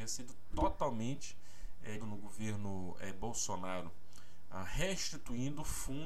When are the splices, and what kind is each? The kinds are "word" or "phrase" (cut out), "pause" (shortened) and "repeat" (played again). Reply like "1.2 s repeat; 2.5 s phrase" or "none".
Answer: 2.0 s word